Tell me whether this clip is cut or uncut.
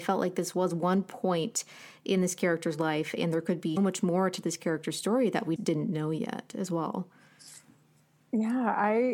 cut